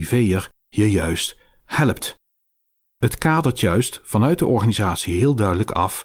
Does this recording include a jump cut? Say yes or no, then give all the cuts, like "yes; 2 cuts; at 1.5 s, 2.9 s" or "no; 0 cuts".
no; 0 cuts